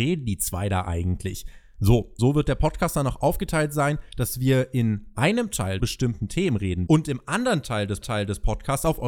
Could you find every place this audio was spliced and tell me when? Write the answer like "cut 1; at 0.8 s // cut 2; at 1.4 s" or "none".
cut 1; at 2.2 s // cut 2; at 5.8 s // cut 3; at 6.9 s // cut 4; at 8.0 s